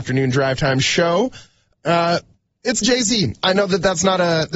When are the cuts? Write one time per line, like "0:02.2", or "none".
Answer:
0:02.8